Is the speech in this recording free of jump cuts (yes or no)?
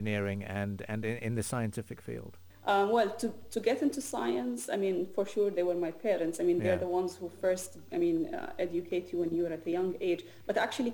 yes